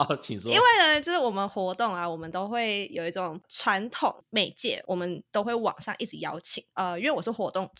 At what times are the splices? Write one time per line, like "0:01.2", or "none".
0:06.7